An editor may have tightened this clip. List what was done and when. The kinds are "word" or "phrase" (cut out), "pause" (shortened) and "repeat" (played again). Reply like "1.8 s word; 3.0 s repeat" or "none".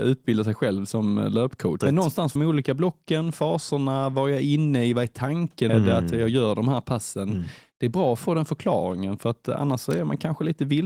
1.8 s word; 2.4 s phrase; 5.7 s word